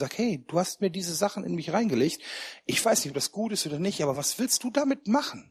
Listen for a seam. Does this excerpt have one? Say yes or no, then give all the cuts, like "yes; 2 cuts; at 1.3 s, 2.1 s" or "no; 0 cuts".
no; 0 cuts